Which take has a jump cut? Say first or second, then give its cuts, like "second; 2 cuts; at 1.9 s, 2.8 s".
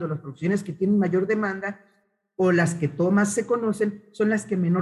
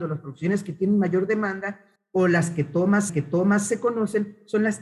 second; 2 cuts; at 2.0 s, 3.1 s